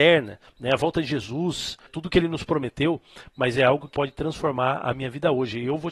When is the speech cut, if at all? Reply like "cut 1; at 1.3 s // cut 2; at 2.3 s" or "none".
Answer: cut 1; at 3.9 s